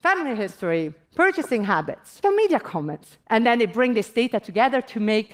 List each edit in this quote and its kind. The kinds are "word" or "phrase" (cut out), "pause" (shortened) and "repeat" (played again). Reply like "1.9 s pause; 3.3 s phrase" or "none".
1.0 s pause; 2.2 s word; 3.2 s pause